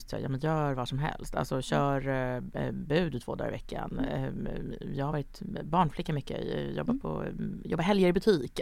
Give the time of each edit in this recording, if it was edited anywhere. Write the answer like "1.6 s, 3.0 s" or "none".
none